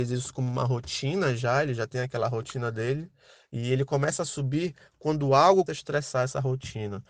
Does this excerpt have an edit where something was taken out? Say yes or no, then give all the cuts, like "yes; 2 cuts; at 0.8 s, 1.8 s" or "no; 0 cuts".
yes; 1 cut; at 5.7 s